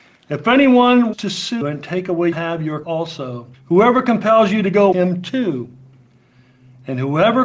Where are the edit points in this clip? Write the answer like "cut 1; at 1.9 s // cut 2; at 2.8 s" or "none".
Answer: cut 1; at 1.1 s // cut 2; at 1.6 s // cut 3; at 2.3 s // cut 4; at 2.8 s // cut 5; at 3.5 s // cut 6; at 4.9 s